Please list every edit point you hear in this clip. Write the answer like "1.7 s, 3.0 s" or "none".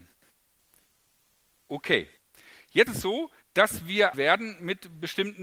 2.9 s, 4.1 s